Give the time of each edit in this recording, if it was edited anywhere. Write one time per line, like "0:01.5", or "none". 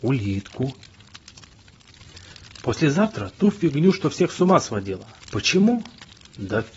0:05.2